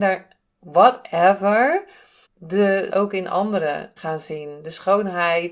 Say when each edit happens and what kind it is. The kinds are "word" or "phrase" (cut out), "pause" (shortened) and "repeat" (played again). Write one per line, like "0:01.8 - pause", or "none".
0:02.3 - word
0:02.9 - word
0:04.0 - word